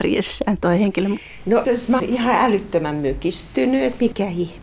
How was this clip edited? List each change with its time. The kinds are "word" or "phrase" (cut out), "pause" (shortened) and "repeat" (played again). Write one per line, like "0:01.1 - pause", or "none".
0:01.6 - word
0:02.0 - word